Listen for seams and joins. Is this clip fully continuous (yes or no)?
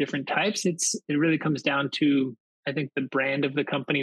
yes